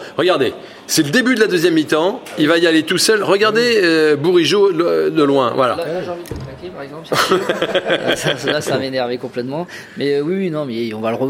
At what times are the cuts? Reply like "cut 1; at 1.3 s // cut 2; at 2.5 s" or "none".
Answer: none

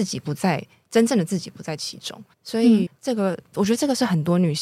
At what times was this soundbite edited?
cut 1; at 2.3 s // cut 2; at 2.9 s

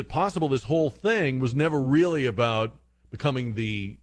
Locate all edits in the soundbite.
none

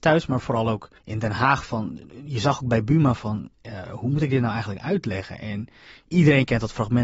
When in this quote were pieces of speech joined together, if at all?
cut 1; at 1.0 s // cut 2; at 3.5 s

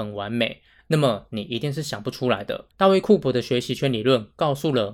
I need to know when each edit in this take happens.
cut 1; at 2.7 s

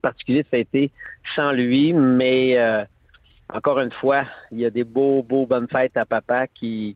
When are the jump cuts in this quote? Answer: none

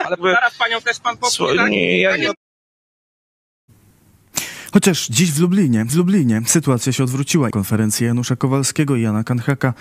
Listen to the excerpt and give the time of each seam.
cut 1; at 5.9 s // cut 2; at 7.5 s

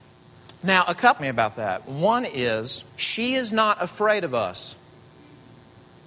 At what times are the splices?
cut 1; at 1.2 s // cut 2; at 2.9 s

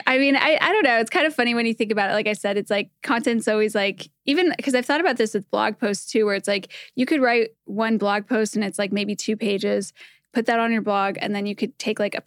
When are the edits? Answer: none

